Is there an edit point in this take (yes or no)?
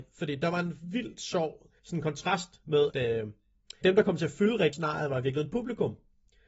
yes